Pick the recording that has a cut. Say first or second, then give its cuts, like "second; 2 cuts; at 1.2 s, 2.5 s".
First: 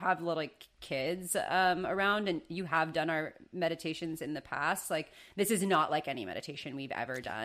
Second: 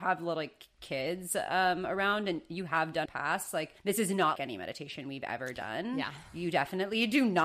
second; 3 cuts; at 3.1 s, 3.8 s, 4.4 s